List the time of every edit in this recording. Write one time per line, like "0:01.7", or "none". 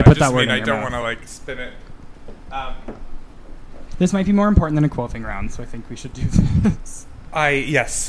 none